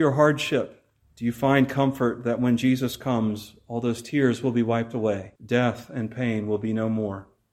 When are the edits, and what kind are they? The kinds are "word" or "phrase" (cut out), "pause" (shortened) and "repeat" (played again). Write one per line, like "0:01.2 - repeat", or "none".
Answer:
0:01.0 - pause
0:05.4 - pause